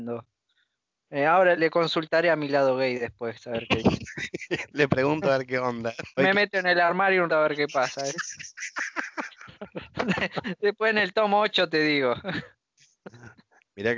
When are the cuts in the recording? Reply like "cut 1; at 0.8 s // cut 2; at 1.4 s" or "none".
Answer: cut 1; at 1.6 s // cut 2; at 6.2 s // cut 3; at 7.3 s